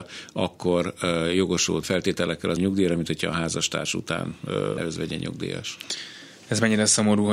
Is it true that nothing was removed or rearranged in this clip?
no; 3 cuts; at 1.8 s, 2.6 s, 4.8 s

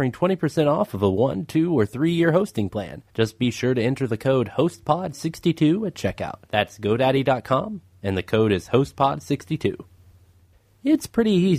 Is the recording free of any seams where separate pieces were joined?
no; 2 cuts; at 3.1 s, 6.5 s

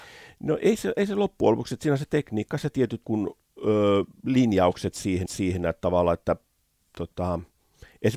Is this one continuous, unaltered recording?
no; 3 cuts; at 2.7 s, 3.0 s, 5.3 s

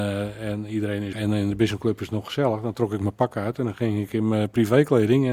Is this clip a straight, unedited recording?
no; 1 cut; at 1.1 s

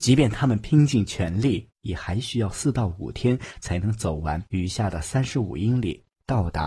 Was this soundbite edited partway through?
yes; 2 cuts; at 1.8 s, 4.5 s

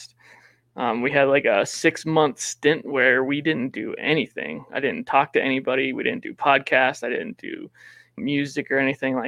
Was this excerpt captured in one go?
no; 1 cut; at 8.2 s

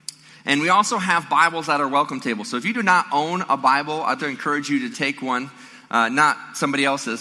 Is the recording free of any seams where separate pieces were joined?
no; 2 cuts; at 4.2 s, 4.9 s

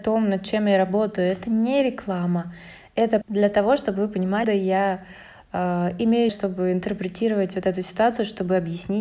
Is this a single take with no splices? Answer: no; 3 cuts; at 3.2 s, 4.4 s, 6.3 s

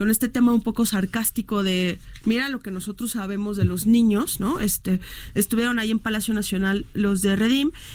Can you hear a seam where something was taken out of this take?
no; 0 cuts

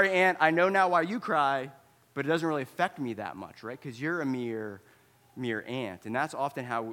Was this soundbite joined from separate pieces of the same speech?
no; 0 cuts

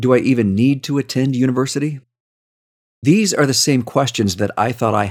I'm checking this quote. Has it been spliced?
no; 0 cuts

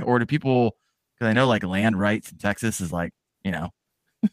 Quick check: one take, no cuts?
yes; 0 cuts

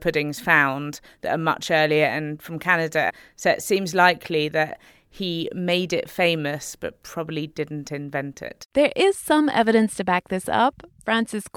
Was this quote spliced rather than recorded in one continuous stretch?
no; 0 cuts

